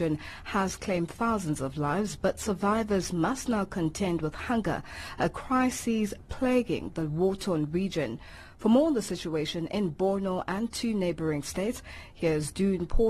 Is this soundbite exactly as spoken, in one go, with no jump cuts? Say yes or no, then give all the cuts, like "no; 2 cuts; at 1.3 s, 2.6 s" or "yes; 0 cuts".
yes; 0 cuts